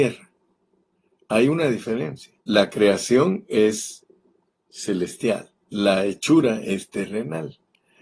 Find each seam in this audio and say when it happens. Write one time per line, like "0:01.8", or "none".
0:02.4
0:05.6

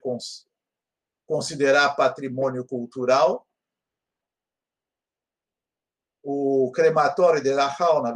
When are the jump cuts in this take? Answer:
none

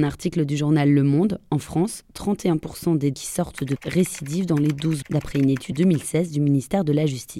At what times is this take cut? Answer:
0:03.1
0:03.8
0:05.0
0:05.7

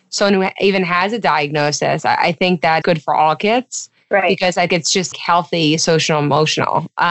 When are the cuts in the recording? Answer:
0:02.8
0:04.7
0:05.1

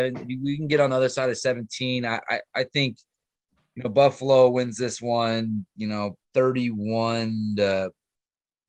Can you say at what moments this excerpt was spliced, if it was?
0:05.7
0:06.2

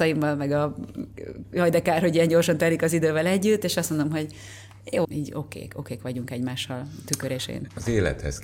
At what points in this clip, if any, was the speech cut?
0:05.0

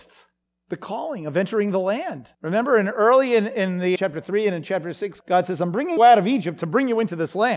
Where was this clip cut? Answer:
0:02.3
0:04.0
0:05.2
0:06.0

